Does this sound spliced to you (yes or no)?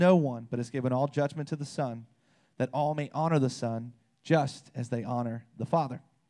no